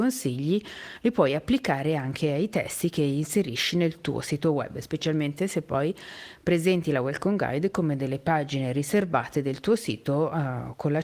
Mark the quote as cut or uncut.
uncut